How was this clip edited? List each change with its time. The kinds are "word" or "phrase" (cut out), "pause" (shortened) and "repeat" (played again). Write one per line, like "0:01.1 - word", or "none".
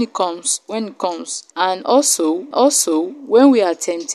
0:01.5 - pause
0:02.5 - repeat